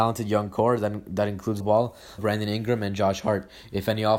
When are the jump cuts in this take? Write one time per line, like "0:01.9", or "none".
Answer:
0:01.6
0:02.2